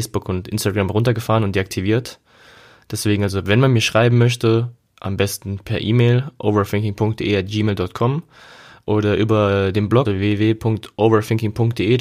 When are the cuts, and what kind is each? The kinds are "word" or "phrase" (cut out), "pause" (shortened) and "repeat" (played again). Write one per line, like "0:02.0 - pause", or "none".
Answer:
0:10.0 - word

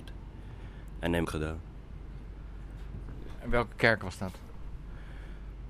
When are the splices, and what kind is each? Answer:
0:01.2 - phrase

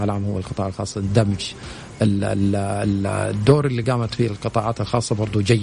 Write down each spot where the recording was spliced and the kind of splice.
none

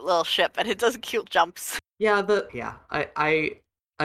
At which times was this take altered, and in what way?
0:01.2 - word
0:01.9 - pause
0:02.5 - word

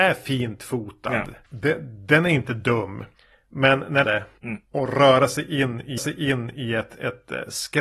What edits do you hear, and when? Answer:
0:04.0 - phrase
0:06.0 - repeat

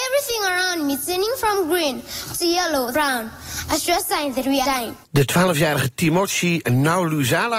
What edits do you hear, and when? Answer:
0:02.9 - word
0:04.6 - word
0:05.0 - pause

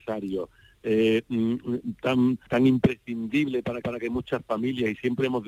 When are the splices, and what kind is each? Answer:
0:02.5 - word
0:03.8 - repeat

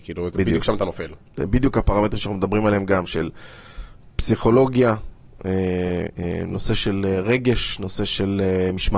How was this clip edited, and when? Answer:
none

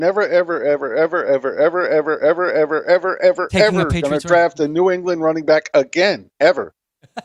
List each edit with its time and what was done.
0:02.2 - repeat

